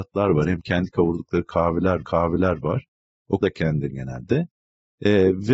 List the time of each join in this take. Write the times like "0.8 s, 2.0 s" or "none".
2.0 s, 3.4 s, 3.9 s